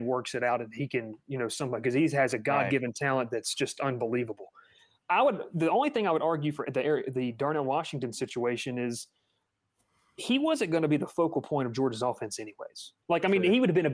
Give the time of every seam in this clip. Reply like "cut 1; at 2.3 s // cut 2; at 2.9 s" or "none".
cut 1; at 5.0 s